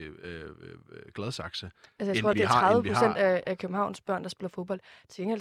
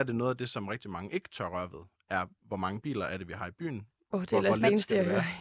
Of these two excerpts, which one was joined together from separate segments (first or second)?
first